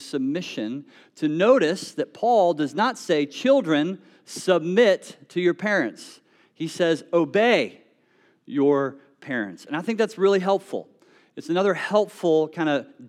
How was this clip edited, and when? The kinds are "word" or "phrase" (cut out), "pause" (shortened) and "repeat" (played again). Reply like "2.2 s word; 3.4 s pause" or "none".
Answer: none